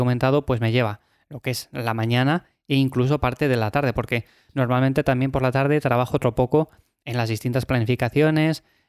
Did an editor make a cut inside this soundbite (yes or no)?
no